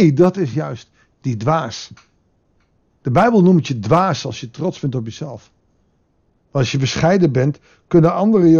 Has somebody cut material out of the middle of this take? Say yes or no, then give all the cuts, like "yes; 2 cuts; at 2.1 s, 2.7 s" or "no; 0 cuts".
no; 0 cuts